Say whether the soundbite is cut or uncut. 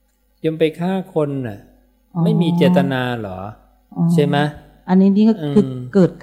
uncut